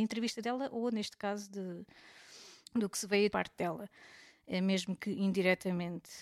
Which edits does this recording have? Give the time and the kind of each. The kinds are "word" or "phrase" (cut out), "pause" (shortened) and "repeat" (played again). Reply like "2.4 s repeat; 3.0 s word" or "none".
2.6 s pause; 3.3 s phrase